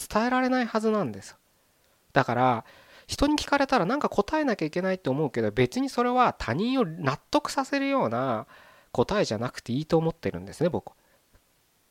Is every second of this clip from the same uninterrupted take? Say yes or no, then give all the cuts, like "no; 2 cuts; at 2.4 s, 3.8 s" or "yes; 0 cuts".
yes; 0 cuts